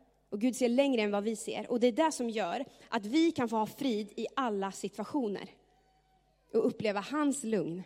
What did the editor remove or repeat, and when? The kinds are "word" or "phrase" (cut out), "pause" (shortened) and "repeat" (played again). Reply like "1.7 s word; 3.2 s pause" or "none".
none